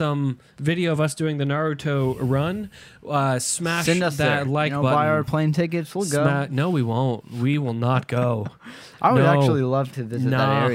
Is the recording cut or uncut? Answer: uncut